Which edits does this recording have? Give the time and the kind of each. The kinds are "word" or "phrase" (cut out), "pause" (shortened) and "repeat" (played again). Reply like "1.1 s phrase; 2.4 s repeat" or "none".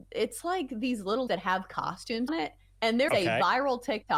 1.3 s word; 2.3 s word; 3.1 s word